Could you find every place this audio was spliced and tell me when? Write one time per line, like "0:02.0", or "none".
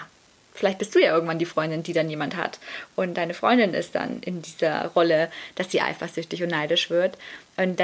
none